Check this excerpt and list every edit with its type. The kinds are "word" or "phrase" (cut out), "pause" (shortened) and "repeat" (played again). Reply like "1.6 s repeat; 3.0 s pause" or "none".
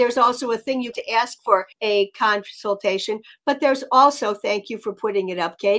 0.9 s phrase; 1.7 s pause